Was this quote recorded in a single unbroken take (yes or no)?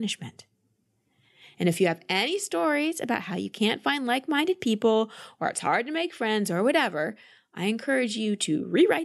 yes